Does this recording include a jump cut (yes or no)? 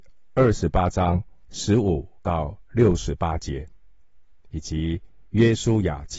yes